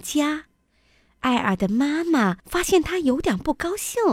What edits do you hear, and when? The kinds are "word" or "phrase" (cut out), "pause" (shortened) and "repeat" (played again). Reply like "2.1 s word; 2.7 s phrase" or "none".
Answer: 2.4 s pause